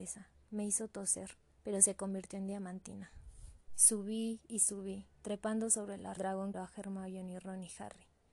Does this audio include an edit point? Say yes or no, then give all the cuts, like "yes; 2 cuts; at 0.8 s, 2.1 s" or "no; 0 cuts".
yes; 5 cuts; at 1.6 s, 3.6 s, 5.1 s, 6.2 s, 6.5 s